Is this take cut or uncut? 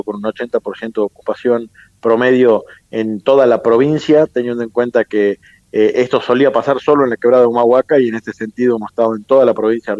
uncut